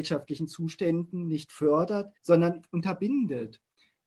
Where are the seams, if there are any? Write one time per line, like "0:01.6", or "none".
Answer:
0:02.2